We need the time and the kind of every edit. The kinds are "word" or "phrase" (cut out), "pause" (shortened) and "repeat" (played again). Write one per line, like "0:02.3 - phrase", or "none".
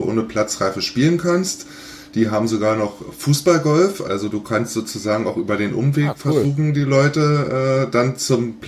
none

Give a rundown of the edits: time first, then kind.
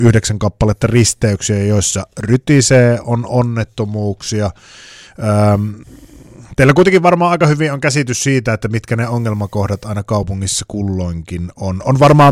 none

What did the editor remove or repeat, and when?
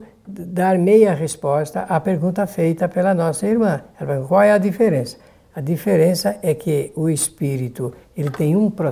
none

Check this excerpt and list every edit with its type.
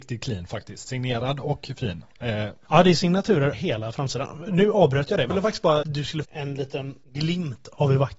0:03.5 - word
0:05.3 - word
0:05.8 - word
0:06.2 - word
0:07.0 - pause

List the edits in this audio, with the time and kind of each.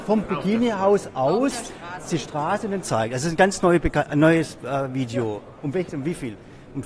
0:02.1 - word
0:02.8 - word
0:05.9 - phrase

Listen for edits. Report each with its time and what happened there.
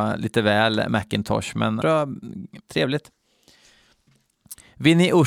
0:01.8 - word
0:02.6 - word

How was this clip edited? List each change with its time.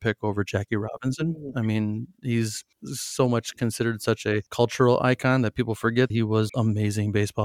0:02.7 - pause
0:04.5 - pause
0:06.1 - word
0:06.5 - phrase

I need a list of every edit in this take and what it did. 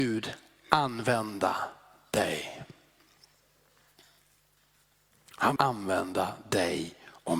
0:05.6 - word

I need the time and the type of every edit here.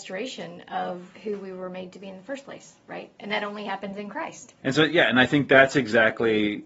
0:01.1 - pause
0:04.6 - pause

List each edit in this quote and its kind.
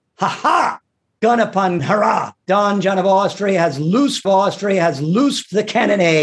0:01.8 - word
0:02.4 - pause
0:04.2 - repeat

